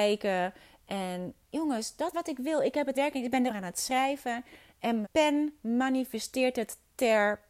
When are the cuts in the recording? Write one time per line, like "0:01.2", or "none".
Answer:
0:01.4
0:02.1
0:02.9
0:03.5
0:05.0